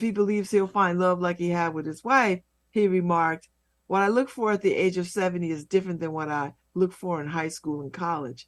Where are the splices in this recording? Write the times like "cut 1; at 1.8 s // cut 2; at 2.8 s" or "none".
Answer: none